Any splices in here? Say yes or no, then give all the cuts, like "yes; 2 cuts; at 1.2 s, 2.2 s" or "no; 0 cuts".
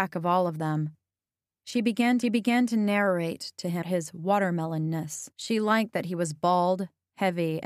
yes; 3 cuts; at 2.2 s, 3.8 s, 5.3 s